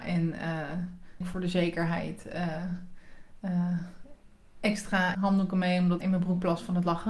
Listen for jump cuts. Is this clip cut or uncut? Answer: cut